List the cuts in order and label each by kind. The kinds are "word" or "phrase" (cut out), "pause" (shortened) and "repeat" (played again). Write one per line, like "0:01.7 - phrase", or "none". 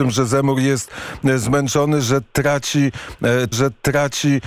0:03.5 - repeat